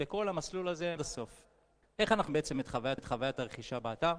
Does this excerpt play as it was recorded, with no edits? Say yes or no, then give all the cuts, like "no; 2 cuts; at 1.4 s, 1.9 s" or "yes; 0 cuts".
no; 4 cuts; at 1.0 s, 1.8 s, 2.3 s, 3.0 s